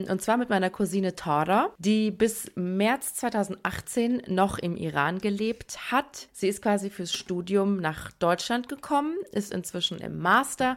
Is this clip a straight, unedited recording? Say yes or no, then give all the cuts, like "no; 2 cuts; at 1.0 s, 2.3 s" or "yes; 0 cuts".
yes; 0 cuts